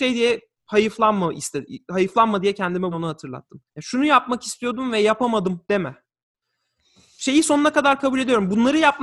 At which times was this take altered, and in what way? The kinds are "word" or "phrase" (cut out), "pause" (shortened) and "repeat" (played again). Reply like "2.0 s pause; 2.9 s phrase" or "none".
2.9 s word; 3.7 s pause; 5.6 s pause